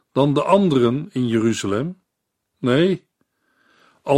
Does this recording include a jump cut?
no; 0 cuts

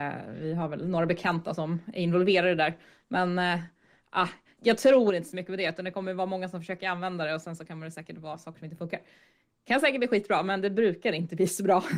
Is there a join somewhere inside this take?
yes; 1 cut; at 4.6 s

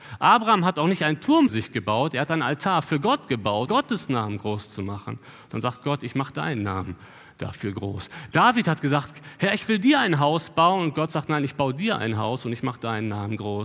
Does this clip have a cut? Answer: yes; 2 cuts; at 1.5 s, 3.7 s

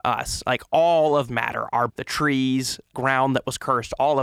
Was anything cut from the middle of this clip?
yes; 3 cuts; at 1.3 s, 1.9 s, 2.9 s

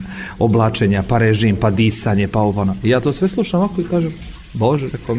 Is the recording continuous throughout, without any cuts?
yes; 0 cuts

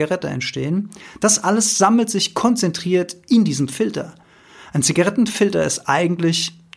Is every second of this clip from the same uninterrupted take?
yes; 0 cuts

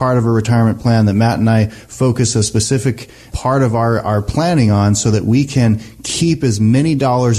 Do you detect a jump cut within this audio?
no; 0 cuts

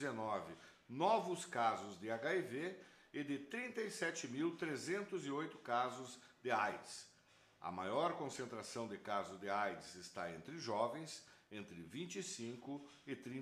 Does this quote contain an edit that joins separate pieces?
no; 0 cuts

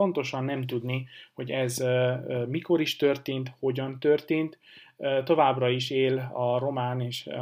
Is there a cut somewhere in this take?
no; 0 cuts

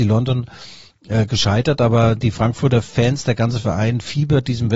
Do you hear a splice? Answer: no; 0 cuts

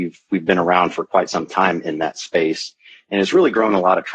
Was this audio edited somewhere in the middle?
no; 0 cuts

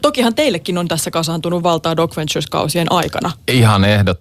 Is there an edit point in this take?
no; 0 cuts

